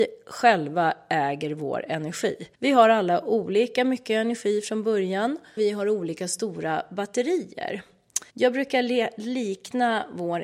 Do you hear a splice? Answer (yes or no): yes